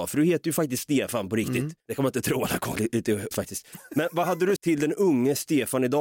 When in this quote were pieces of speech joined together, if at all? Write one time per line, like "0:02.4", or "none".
0:01.8
0:02.8
0:03.3
0:04.6